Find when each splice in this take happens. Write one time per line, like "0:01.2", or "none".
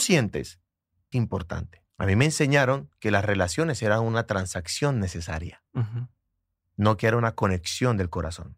0:01.1
0:01.9
0:05.7